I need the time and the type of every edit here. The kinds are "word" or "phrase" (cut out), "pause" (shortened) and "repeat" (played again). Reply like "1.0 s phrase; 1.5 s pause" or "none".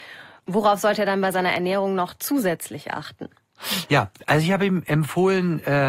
none